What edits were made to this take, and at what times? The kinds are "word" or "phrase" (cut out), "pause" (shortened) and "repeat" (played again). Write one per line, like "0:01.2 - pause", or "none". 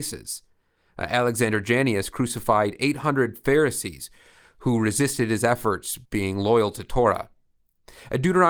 0:06.0 - pause